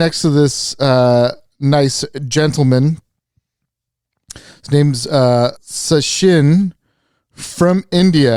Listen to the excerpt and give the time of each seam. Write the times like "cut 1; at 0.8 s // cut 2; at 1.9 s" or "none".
cut 1; at 5.6 s